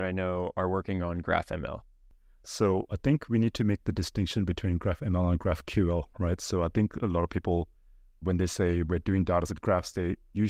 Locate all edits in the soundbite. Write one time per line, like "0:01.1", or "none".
0:08.2
0:09.5